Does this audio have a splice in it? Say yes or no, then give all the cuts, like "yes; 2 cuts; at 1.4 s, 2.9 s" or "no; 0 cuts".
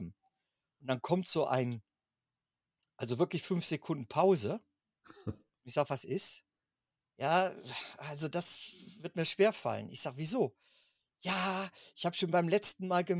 no; 0 cuts